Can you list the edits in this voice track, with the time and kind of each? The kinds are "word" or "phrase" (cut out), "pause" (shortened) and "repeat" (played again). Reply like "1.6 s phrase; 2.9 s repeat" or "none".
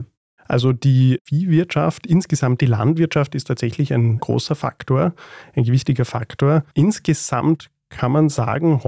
6.7 s pause